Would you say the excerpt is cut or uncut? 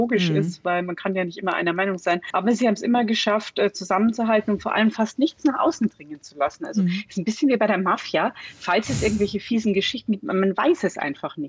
uncut